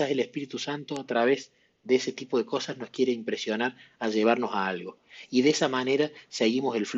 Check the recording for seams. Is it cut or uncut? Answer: uncut